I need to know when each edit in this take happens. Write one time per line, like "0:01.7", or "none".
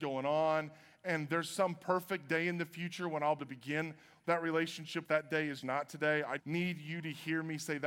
0:03.4
0:05.0
0:05.6
0:06.4